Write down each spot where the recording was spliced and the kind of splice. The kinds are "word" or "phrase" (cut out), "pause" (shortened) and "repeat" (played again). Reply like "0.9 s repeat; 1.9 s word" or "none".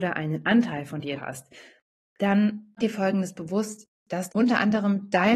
1.2 s word; 2.8 s word; 4.3 s word